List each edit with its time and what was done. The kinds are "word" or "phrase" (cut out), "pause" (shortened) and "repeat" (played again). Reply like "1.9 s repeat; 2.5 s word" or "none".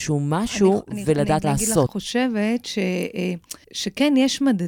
1.4 s phrase; 1.9 s phrase; 3.6 s pause

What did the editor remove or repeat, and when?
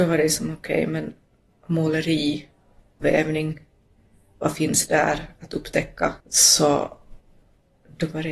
3.0 s word; 6.2 s pause

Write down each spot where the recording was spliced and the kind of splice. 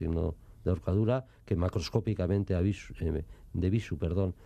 none

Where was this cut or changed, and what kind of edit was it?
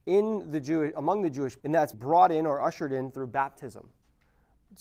1.6 s word; 1.9 s word

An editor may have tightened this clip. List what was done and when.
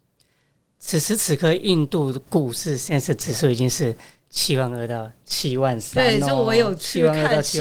none

